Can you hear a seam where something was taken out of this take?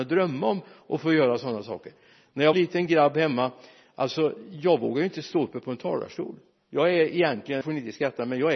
yes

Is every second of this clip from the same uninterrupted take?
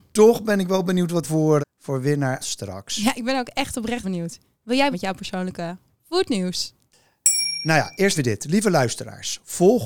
no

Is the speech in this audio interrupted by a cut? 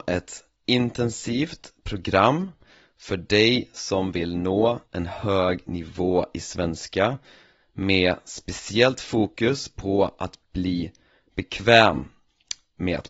no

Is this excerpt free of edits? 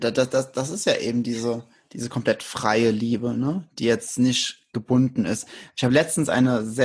yes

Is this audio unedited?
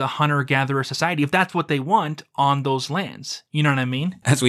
yes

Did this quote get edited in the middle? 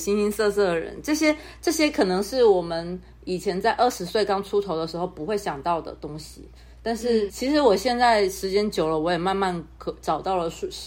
yes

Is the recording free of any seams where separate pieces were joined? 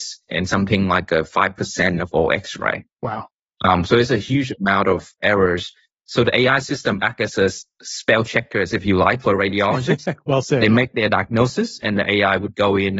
yes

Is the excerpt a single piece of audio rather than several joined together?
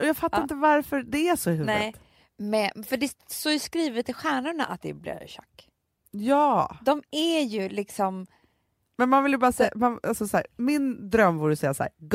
yes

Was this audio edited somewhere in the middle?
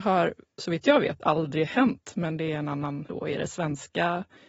yes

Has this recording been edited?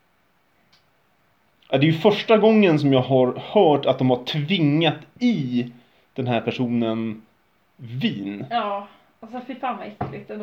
no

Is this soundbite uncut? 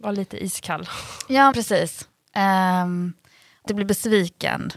no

